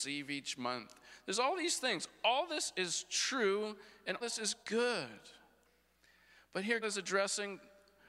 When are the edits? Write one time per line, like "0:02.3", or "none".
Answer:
0:04.2
0:04.6
0:06.8